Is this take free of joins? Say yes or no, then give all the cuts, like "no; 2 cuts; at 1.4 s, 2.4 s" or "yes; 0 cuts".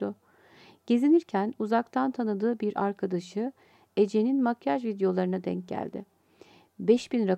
yes; 0 cuts